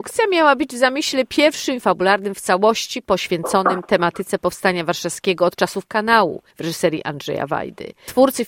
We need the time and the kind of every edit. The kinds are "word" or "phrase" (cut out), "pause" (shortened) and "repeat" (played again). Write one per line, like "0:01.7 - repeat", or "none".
0:01.8 - word
0:06.5 - pause